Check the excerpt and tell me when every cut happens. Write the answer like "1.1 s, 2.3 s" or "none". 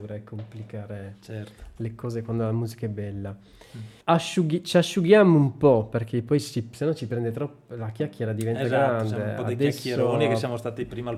4.0 s